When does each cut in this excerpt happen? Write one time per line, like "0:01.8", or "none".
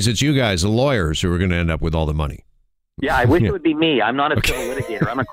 none